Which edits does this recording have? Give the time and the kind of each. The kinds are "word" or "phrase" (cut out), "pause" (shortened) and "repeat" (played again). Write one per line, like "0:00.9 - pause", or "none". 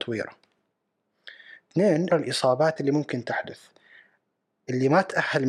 0:02.1 - word
0:02.8 - phrase